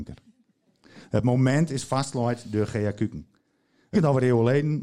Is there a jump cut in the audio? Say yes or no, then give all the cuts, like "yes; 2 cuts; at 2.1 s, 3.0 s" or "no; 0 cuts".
yes; 1 cut; at 3.9 s